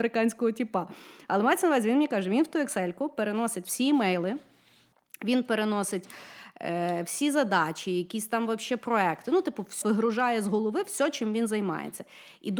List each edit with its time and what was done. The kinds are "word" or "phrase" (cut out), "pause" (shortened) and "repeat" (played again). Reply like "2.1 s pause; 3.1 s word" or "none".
9.8 s word